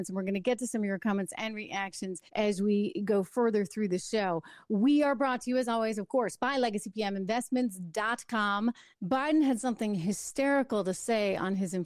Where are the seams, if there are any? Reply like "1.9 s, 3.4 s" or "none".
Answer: 2.3 s, 8.9 s